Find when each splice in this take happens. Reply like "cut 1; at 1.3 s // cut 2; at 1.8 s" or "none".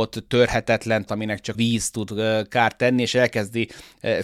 cut 1; at 1.1 s // cut 2; at 1.5 s